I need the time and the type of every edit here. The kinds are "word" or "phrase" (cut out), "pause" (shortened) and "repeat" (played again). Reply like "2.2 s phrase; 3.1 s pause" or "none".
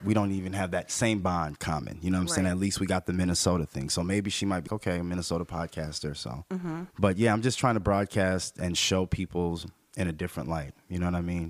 4.7 s word; 6.9 s pause